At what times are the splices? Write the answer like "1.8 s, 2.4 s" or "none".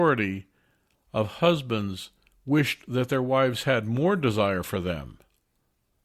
none